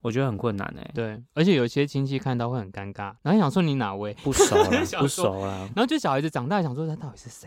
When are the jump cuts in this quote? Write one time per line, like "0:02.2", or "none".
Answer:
0:03.2